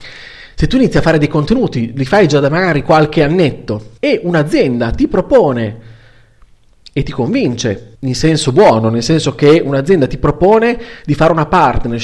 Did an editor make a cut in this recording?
yes; 2 cuts; at 4.0 s, 7.9 s

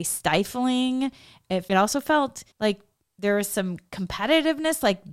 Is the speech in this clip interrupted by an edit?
yes; 2 cuts; at 1.7 s, 2.5 s

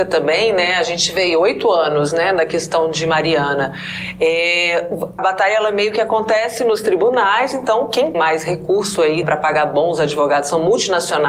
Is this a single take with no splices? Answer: no; 3 cuts; at 5.2 s, 8.1 s, 9.2 s

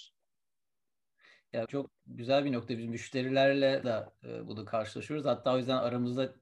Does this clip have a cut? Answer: yes; 2 cuts; at 1.7 s, 3.8 s

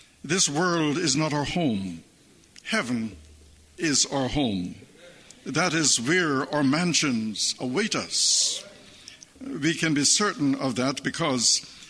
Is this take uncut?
yes; 0 cuts

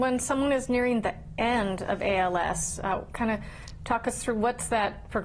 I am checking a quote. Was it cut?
no; 0 cuts

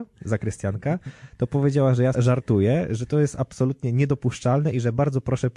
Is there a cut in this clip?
yes; 1 cut; at 2.1 s

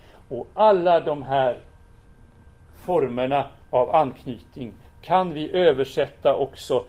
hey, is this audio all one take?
yes; 0 cuts

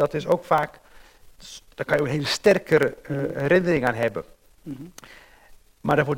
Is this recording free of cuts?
yes; 0 cuts

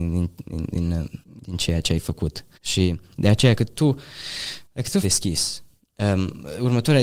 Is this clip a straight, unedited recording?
no; 5 cuts; at 1.2 s, 2.5 s, 3.6 s, 4.6 s, 5.0 s

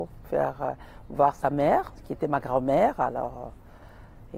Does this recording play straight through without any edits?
yes; 0 cuts

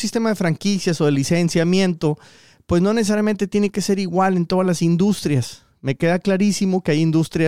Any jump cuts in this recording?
no; 0 cuts

